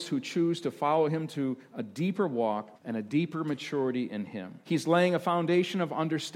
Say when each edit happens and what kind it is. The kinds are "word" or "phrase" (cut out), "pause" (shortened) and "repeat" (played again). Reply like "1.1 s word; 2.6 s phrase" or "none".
2.8 s pause; 4.6 s pause